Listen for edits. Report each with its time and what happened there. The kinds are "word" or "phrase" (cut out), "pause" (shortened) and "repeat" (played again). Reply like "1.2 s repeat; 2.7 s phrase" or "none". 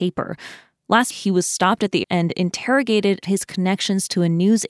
1.1 s word; 2.0 s word; 3.2 s word

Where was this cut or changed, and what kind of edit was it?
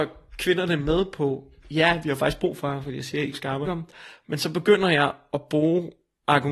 3.3 s word; 3.6 s phrase

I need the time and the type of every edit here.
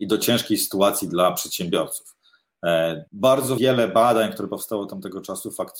3.1 s pause

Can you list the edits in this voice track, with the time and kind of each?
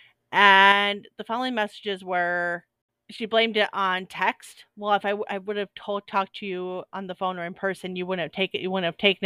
none

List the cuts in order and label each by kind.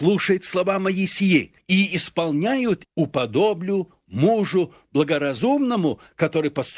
1.6 s pause; 2.8 s word

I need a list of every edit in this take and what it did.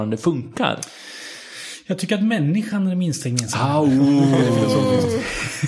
none

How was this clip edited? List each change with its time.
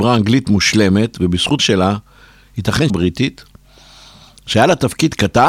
1.6 s word; 2.9 s word

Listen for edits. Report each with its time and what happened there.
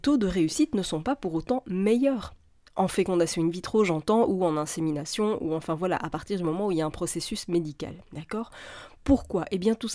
none

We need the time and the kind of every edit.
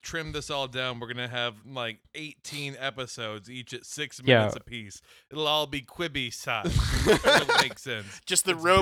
none

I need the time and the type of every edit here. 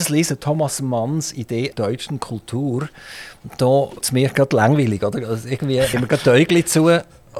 1.7 s word; 4.0 s word; 5.9 s word

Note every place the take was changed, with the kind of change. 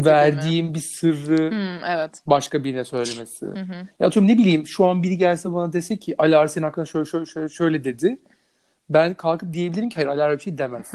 none

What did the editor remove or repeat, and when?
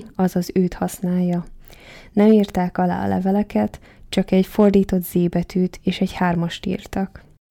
none

